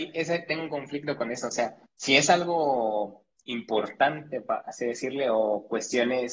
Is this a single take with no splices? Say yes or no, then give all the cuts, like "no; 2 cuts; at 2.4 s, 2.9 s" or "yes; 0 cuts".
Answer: no; 1 cut; at 1.9 s